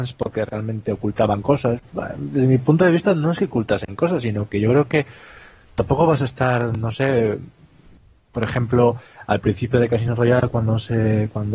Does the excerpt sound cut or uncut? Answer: uncut